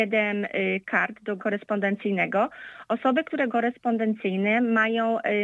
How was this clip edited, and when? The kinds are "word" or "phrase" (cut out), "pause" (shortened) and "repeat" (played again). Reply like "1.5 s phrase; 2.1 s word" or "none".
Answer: 1.4 s word; 3.5 s word